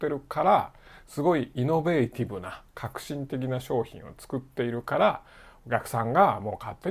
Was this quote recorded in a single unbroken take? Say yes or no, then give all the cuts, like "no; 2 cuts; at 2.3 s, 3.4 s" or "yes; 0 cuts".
yes; 0 cuts